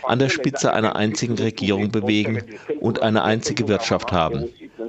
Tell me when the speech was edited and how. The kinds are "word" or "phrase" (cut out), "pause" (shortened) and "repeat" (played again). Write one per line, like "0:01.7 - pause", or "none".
none

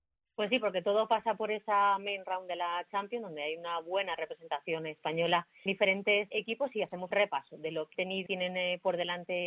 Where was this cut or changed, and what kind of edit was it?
0:05.7 - word
0:06.3 - word
0:07.1 - word
0:07.9 - word
0:08.3 - word

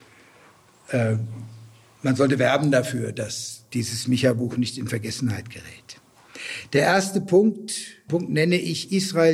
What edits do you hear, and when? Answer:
0:08.1 - phrase

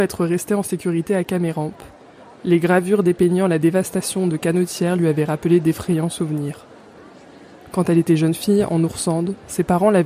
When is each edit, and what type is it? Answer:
none

